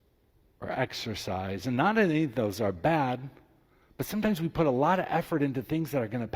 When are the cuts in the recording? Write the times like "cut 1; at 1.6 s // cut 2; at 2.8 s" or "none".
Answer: none